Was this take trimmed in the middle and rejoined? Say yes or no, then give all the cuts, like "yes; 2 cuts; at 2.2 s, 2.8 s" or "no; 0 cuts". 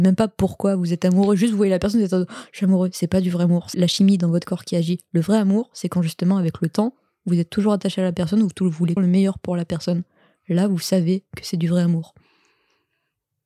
yes; 2 cuts; at 3.7 s, 9.0 s